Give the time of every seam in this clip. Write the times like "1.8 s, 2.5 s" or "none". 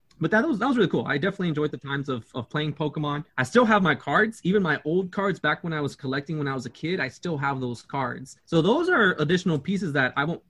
3.3 s, 8.4 s